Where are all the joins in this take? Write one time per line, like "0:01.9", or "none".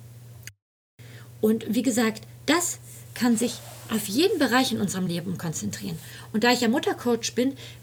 none